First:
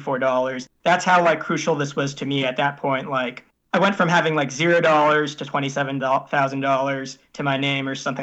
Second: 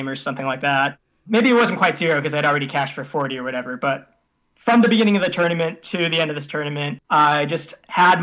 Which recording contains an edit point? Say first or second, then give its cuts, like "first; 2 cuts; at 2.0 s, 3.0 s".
second; 1 cut; at 7.0 s